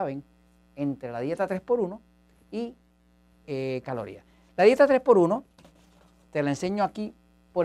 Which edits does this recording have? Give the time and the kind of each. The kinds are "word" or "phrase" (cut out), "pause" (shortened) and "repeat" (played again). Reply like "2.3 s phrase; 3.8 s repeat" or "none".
3.8 s word